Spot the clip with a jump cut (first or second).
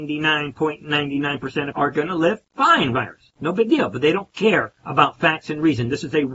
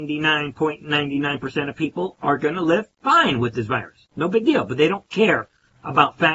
first